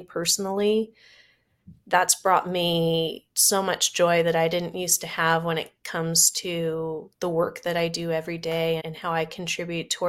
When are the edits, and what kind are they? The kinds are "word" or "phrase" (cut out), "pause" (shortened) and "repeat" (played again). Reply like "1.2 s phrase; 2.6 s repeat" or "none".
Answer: 3.3 s pause; 7.1 s pause; 8.8 s word